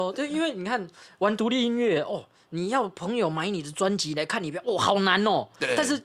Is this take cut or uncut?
uncut